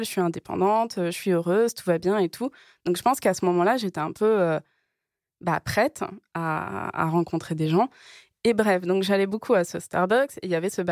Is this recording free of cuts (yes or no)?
yes